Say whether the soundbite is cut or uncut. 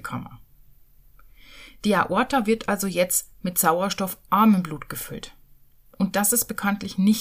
uncut